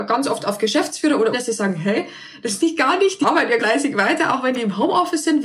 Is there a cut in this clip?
yes; 4 cuts; at 1.3 s, 2.6 s, 3.2 s, 3.6 s

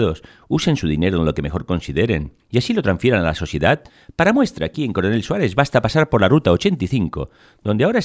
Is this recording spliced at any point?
yes; 2 cuts; at 2.4 s, 3.9 s

